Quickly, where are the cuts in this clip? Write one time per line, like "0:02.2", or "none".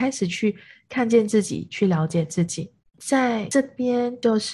0:02.8